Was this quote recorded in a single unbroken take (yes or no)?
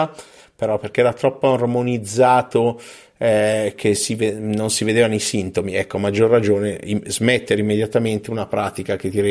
yes